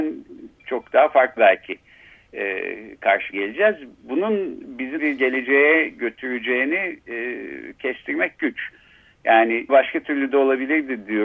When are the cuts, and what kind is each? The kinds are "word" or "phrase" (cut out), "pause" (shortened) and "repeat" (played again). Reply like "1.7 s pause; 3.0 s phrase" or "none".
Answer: 1.4 s word; 3.3 s word; 5.0 s word; 9.7 s word